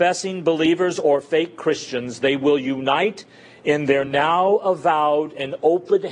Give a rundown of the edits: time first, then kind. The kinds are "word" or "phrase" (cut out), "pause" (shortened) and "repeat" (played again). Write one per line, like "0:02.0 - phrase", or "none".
none